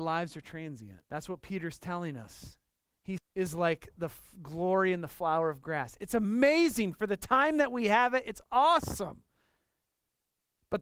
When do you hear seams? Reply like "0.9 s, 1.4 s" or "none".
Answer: 1.0 s, 3.2 s